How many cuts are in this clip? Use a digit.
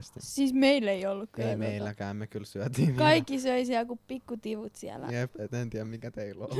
0